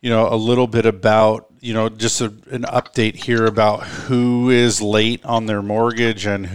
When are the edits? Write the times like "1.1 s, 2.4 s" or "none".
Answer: none